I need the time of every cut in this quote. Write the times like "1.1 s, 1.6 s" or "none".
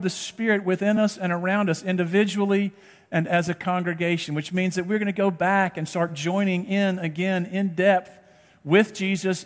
none